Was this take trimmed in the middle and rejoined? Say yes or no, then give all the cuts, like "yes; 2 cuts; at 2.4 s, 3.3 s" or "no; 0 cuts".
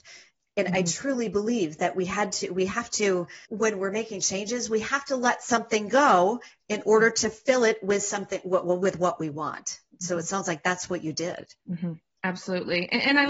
yes; 2 cuts; at 3.5 s, 11.6 s